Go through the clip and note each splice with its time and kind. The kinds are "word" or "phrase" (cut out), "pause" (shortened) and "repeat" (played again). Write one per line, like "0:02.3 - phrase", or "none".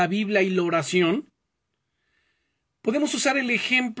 none